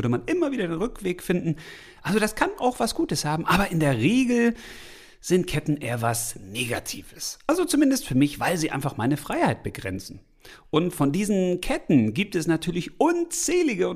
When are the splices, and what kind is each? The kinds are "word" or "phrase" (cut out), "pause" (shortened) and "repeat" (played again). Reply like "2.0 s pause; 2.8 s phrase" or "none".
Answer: none